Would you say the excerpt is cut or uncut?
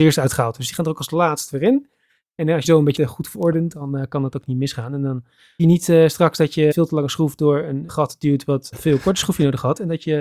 cut